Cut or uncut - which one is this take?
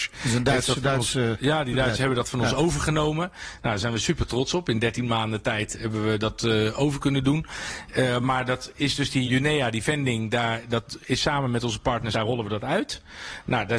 cut